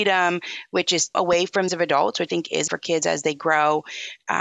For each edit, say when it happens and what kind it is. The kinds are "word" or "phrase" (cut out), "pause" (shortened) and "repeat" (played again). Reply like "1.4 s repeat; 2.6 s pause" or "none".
1.1 s word; 1.7 s phrase; 2.3 s word; 2.7 s phrase